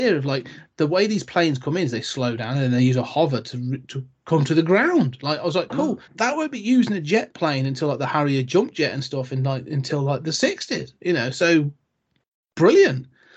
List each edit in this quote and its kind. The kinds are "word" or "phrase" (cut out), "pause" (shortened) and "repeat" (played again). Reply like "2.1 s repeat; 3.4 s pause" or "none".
6.1 s pause; 11.0 s pause